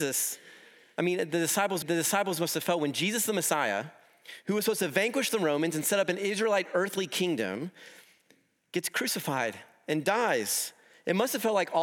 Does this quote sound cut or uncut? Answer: cut